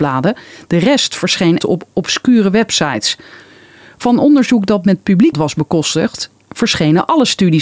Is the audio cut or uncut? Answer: cut